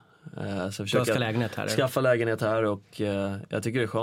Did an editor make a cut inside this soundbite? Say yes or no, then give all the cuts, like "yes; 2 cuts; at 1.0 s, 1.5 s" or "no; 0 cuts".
yes; 1 cut; at 1.2 s